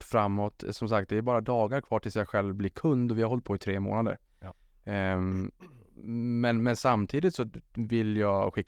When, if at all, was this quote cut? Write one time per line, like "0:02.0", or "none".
none